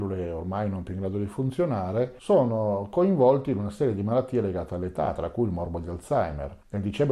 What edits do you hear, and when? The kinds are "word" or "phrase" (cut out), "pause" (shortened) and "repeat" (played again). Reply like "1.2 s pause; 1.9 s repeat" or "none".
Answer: none